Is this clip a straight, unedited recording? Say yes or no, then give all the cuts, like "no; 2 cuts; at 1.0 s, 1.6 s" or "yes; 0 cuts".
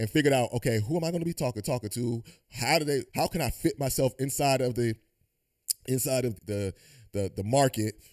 no; 3 cuts; at 1.6 s, 3.1 s, 6.3 s